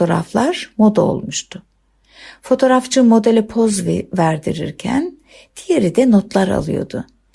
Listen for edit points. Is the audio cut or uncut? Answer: uncut